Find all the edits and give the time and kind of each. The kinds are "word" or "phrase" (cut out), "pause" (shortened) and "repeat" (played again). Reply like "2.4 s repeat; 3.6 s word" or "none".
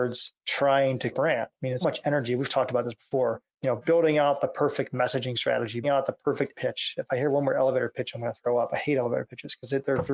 1.1 s phrase; 1.8 s word; 3.5 s pause; 5.8 s phrase; 6.5 s word